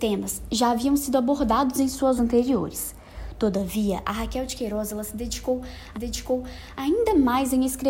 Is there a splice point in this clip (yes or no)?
yes